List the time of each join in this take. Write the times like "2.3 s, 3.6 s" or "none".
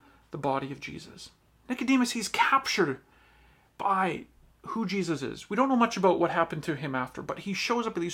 none